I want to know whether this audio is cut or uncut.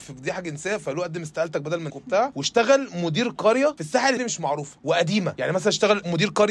cut